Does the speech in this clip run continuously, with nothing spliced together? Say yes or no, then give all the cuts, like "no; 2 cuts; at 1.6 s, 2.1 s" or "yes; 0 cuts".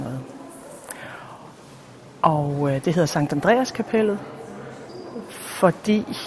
yes; 0 cuts